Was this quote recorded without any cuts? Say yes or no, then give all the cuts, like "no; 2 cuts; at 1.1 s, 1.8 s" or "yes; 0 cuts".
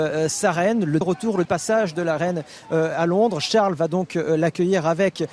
no; 2 cuts; at 1.0 s, 1.4 s